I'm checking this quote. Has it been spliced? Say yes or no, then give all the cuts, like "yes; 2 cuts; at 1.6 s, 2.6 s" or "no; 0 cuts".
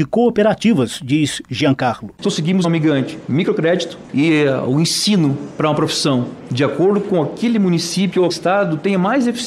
yes; 4 cuts; at 2.2 s, 2.6 s, 4.1 s, 8.3 s